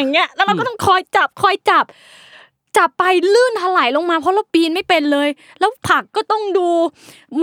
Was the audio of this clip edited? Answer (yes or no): no